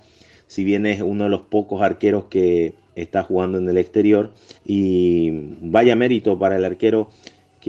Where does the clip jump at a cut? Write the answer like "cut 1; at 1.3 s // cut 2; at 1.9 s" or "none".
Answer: cut 1; at 4.6 s